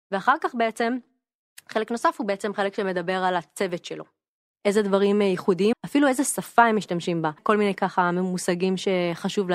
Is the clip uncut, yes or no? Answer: no